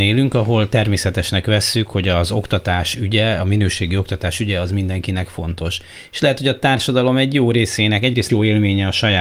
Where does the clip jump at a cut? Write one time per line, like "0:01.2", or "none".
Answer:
0:08.3